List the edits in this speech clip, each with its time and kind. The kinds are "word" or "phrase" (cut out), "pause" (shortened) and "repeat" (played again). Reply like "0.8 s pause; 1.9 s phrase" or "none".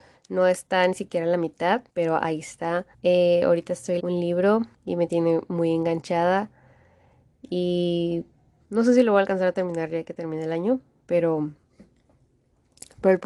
1.9 s pause; 2.9 s pause; 4.0 s word; 4.7 s pause; 8.6 s word